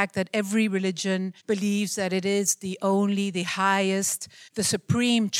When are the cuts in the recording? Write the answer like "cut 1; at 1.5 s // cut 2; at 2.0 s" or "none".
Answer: cut 1; at 1.4 s // cut 2; at 4.5 s

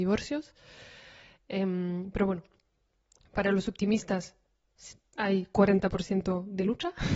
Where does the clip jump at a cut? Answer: none

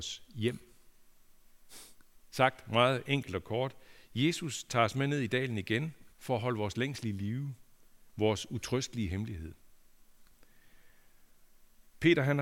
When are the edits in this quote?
cut 1; at 6.1 s

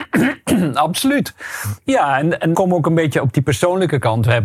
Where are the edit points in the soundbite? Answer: cut 1; at 2.5 s

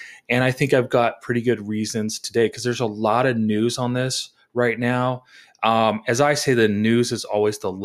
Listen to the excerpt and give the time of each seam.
none

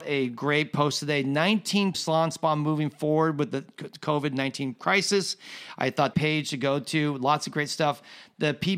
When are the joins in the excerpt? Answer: cut 1; at 1.9 s // cut 2; at 6.1 s

